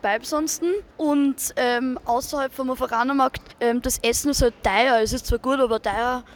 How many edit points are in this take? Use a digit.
2